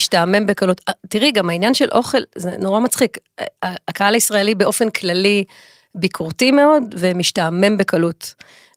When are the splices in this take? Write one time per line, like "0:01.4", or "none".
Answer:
none

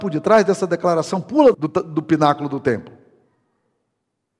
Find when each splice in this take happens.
0:01.5

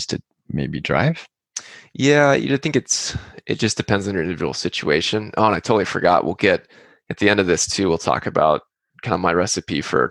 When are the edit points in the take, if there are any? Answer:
none

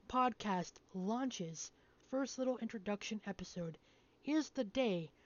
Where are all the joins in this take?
0:02.0

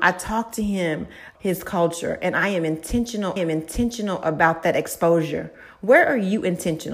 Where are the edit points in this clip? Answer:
0:01.3
0:03.4

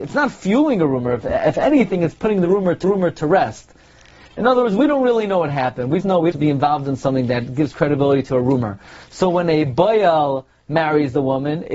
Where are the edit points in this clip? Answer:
0:02.8
0:06.0
0:06.3

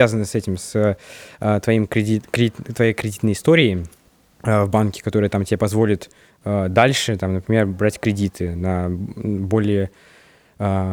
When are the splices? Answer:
none

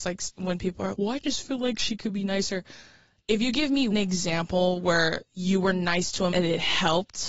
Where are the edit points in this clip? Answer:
0:00.9
0:03.9
0:06.3

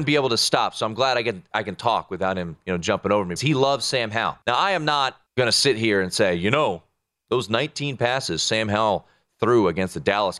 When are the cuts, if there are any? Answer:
0:03.4
0:04.4
0:05.3

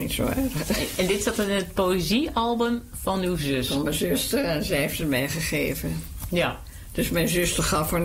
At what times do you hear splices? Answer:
none

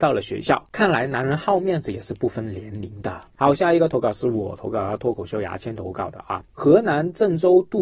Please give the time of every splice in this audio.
0:03.3

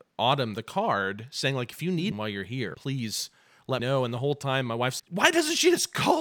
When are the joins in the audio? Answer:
0:02.1
0:02.7
0:03.8
0:05.0

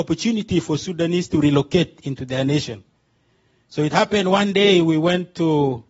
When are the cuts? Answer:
none

